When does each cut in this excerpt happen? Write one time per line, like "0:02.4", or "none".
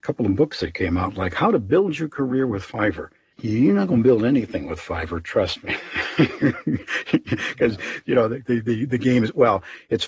none